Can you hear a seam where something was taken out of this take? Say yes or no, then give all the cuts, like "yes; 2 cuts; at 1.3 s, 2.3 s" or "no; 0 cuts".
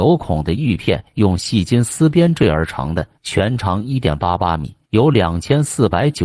yes; 2 cuts; at 3.2 s, 4.8 s